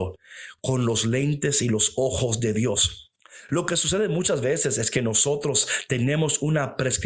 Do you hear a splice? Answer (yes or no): no